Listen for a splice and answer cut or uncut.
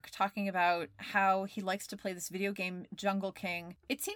uncut